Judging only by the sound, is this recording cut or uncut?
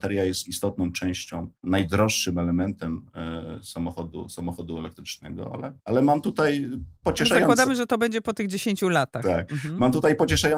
cut